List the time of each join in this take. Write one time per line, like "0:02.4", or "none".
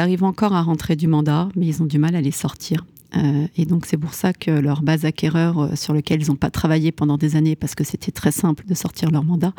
none